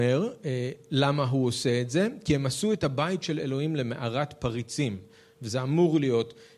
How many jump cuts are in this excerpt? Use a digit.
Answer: 0